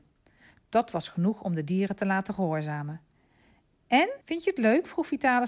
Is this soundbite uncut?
no; 1 cut; at 4.2 s

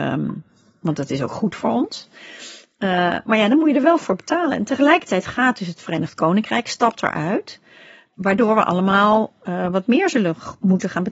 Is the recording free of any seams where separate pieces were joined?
yes; 0 cuts

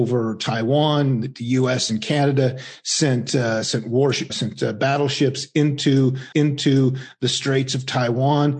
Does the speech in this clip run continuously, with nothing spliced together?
no; 2 cuts; at 4.3 s, 6.3 s

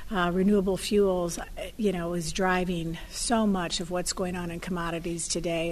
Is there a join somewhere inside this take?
no; 0 cuts

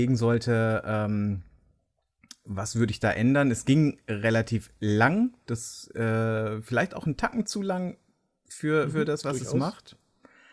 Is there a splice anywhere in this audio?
no; 0 cuts

